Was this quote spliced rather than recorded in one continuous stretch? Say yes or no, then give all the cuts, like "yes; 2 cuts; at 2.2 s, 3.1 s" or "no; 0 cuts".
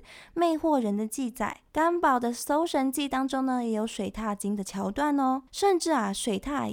yes; 2 cuts; at 1.7 s, 5.5 s